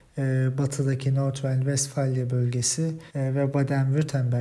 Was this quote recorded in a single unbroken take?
no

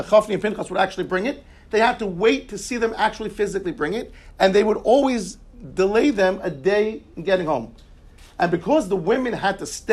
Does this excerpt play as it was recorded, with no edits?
yes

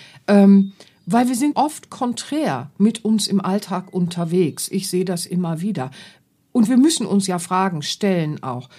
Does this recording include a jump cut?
yes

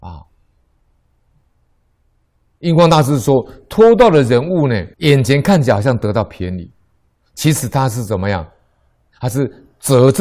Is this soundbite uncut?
no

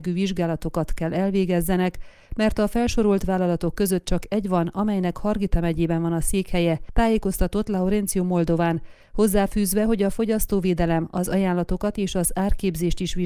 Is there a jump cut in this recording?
no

